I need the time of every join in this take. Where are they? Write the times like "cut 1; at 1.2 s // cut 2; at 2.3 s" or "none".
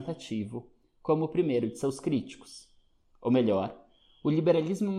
none

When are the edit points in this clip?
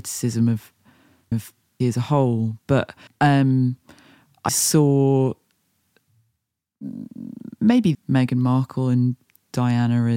cut 1; at 1.3 s // cut 2; at 1.8 s // cut 3; at 3.1 s // cut 4; at 4.5 s // cut 5; at 7.9 s

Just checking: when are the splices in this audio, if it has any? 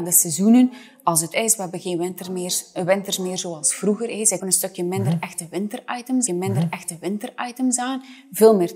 cut 1; at 1.3 s // cut 2; at 4.4 s // cut 3; at 6.3 s

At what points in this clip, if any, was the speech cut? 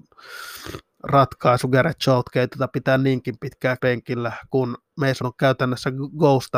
cut 1; at 3.8 s // cut 2; at 5.2 s

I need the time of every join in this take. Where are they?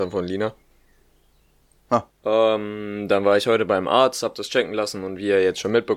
cut 1; at 2.1 s

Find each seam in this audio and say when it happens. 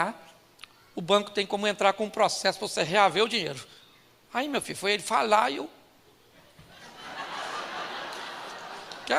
none

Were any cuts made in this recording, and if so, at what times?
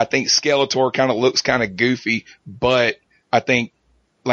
none

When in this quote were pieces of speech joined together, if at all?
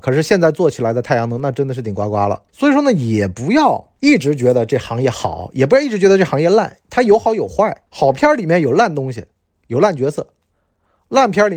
cut 1; at 2.5 s // cut 2; at 4.0 s // cut 3; at 7.9 s

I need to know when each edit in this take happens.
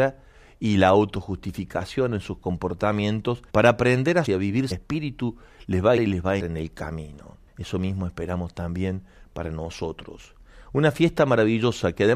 cut 1; at 3.5 s // cut 2; at 4.3 s // cut 3; at 4.7 s // cut 4; at 6.0 s // cut 5; at 6.4 s // cut 6; at 7.5 s

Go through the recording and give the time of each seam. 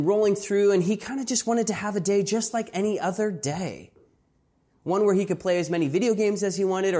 none

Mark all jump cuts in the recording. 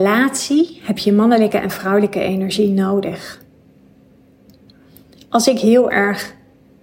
none

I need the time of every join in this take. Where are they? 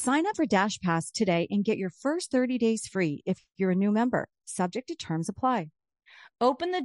cut 1; at 5.0 s

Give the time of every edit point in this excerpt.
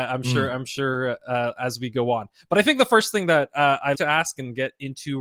cut 1; at 3.9 s

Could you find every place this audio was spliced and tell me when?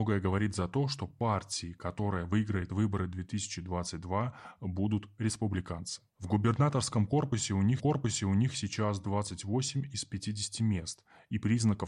cut 1; at 6.1 s // cut 2; at 7.8 s

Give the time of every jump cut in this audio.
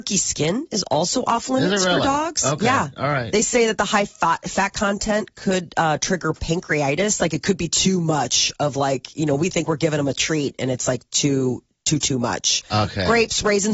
none

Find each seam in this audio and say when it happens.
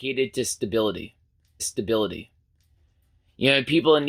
cut 1; at 1.6 s

